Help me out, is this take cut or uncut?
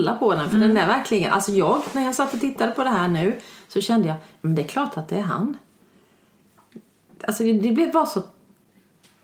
uncut